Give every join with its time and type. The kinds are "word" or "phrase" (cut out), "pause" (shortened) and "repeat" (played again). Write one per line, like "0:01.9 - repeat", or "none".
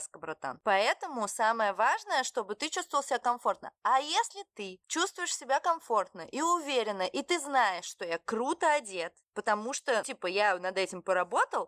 0:09.2 - pause
0:10.0 - word